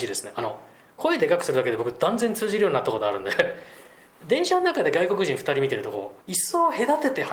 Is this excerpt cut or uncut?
cut